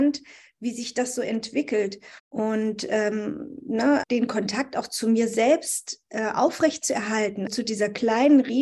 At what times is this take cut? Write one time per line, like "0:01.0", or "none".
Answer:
0:02.2
0:04.0
0:07.5